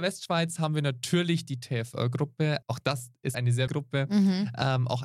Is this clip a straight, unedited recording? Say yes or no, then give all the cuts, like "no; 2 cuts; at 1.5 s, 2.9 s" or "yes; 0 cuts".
no; 3 cuts; at 2.6 s, 3.3 s, 3.7 s